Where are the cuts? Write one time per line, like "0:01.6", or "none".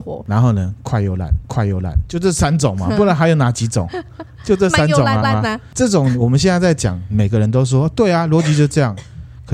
0:01.4
0:05.2